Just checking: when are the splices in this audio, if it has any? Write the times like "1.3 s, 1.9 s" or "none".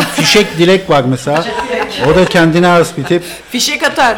2.3 s